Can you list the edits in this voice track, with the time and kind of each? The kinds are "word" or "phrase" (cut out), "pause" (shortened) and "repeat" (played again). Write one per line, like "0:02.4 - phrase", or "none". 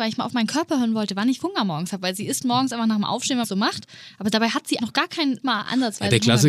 0:01.4 - word
0:03.4 - word
0:04.8 - word
0:05.4 - word